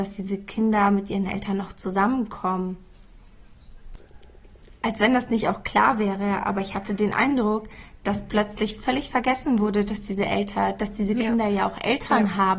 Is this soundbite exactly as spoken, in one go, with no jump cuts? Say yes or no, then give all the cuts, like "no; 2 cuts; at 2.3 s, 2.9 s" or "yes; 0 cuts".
yes; 0 cuts